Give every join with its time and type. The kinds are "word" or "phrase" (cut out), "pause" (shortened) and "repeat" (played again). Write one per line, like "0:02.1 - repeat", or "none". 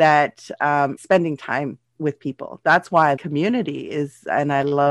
0:01.0 - word
0:02.0 - word
0:03.2 - word